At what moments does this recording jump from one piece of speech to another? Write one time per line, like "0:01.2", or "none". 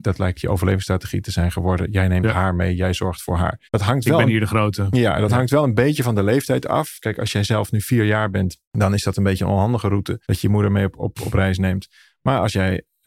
0:03.7
0:08.7
0:10.2